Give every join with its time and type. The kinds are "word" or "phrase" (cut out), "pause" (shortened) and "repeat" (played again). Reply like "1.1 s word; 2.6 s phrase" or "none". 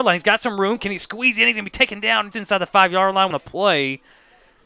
2.3 s word; 3.3 s phrase